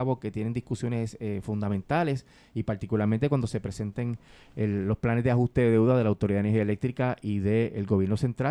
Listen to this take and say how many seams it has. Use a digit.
0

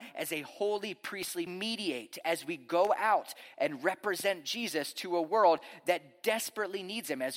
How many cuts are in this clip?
1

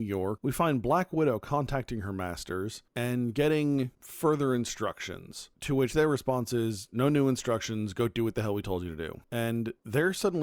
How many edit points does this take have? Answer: 0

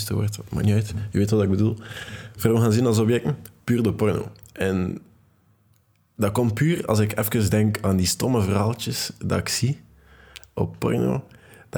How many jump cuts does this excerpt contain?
0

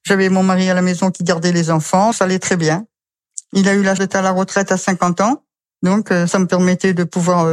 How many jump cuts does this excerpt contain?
2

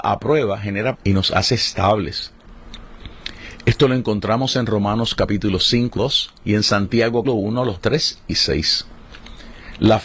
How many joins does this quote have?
4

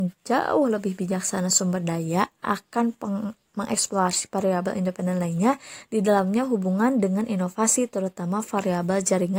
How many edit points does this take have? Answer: 0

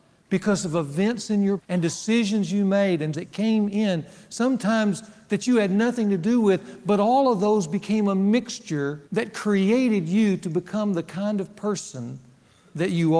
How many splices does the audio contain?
3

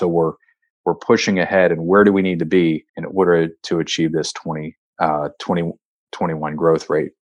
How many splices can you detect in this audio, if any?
2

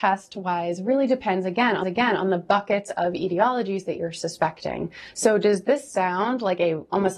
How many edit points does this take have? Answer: 1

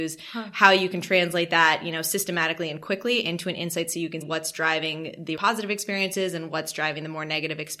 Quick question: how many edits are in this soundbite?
2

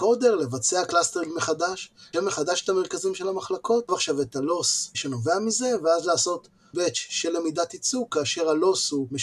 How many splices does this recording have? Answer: 3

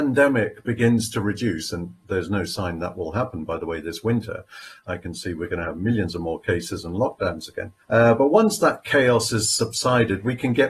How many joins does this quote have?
1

